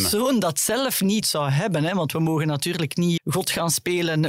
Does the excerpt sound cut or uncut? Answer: cut